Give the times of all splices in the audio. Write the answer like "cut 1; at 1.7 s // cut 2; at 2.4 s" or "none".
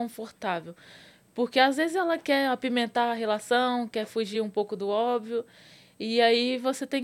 none